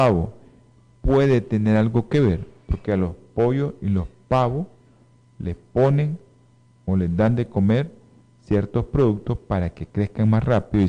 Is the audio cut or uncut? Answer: uncut